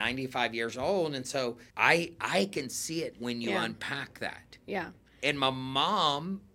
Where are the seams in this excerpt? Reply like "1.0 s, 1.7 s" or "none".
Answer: 1.7 s, 3.1 s

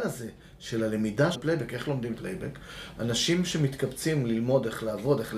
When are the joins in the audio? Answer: 1.3 s, 2.2 s

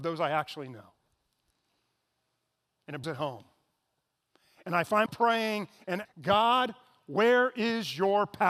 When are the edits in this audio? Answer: 3.0 s, 5.1 s, 6.0 s

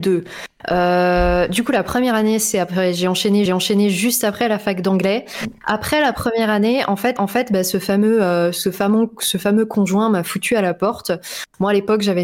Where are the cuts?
3.5 s, 7.2 s

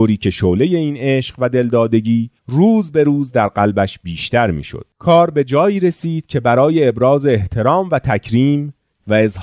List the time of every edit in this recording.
2.4 s, 4.9 s

